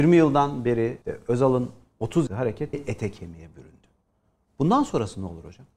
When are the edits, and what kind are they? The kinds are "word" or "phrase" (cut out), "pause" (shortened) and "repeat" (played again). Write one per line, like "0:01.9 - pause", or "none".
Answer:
0:01.0 - pause
0:02.3 - phrase
0:02.7 - word